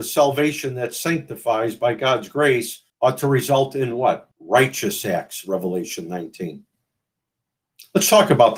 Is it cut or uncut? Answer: cut